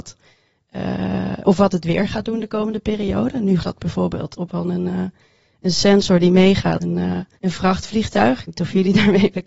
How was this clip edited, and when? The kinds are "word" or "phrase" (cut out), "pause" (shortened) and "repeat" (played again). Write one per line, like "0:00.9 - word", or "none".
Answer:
0:03.6 - word
0:04.5 - word
0:06.8 - word
0:07.4 - pause
0:08.5 - word